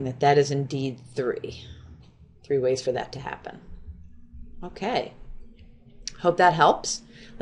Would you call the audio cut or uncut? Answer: uncut